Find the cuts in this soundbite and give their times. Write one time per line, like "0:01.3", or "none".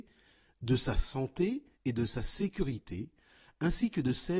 0:01.7